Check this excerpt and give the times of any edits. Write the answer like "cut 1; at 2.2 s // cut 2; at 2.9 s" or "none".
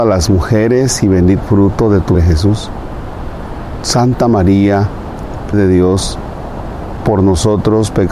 cut 1; at 1.4 s // cut 2; at 2.1 s // cut 3; at 5.5 s // cut 4; at 7.0 s